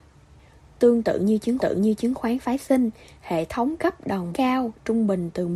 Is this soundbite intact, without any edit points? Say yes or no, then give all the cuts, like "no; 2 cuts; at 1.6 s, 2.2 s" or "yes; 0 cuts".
no; 3 cuts; at 1.6 s, 3.8 s, 4.3 s